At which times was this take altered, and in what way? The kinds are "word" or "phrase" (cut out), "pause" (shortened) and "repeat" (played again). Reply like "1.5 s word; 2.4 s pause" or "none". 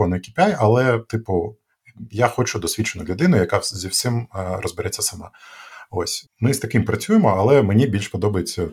6.2 s word